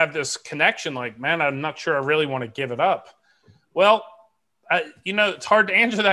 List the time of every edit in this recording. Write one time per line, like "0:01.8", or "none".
none